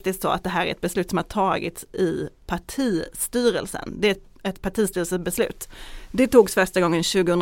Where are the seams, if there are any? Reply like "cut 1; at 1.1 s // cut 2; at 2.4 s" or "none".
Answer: none